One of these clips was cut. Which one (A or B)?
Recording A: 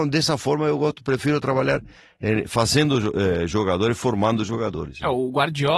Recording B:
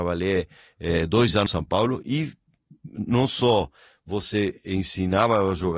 B